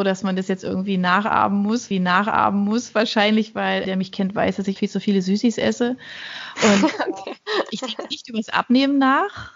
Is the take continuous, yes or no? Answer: no